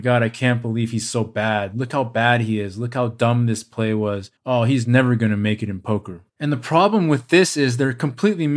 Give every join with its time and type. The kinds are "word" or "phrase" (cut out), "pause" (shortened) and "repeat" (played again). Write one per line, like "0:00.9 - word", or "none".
0:04.4 - pause
0:06.3 - pause